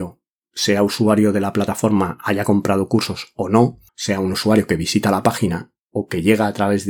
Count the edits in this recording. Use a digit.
1